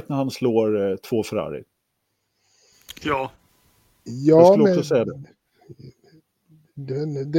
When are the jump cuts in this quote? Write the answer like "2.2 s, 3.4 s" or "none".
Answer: none